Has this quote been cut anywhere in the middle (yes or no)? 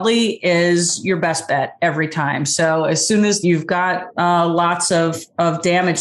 yes